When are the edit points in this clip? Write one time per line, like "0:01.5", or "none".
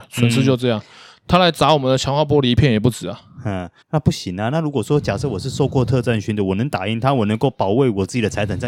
0:03.8